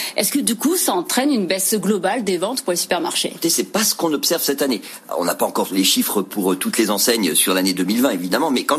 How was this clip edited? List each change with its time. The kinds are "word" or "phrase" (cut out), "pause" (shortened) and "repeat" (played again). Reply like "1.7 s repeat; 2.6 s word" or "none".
none